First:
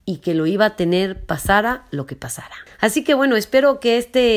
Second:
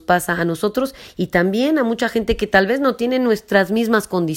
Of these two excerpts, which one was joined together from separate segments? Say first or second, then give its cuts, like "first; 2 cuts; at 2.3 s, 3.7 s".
first; 1 cut; at 2.7 s